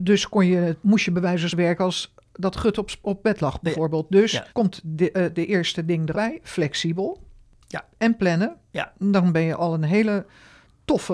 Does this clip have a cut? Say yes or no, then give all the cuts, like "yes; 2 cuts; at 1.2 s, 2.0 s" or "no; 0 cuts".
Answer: yes; 3 cuts; at 1.5 s, 4.5 s, 6.1 s